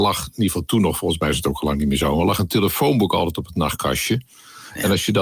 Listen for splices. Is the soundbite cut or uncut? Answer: uncut